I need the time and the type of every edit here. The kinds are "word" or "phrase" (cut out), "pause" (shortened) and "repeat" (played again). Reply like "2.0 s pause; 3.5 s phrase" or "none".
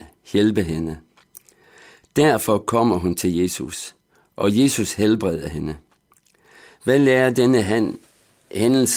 none